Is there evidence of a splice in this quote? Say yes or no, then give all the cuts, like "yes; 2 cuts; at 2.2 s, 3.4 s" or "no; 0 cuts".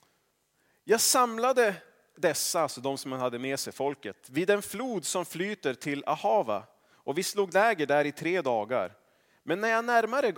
no; 0 cuts